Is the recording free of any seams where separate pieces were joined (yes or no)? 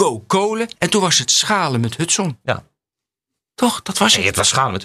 yes